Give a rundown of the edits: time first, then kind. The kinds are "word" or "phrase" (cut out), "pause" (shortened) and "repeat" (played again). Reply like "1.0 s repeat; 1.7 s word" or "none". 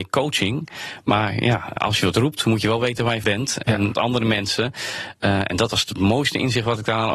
1.8 s word; 3.2 s word; 3.9 s word